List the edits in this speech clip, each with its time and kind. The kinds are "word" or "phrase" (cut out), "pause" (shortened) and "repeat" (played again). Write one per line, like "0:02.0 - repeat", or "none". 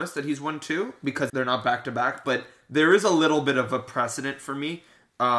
0:01.3 - word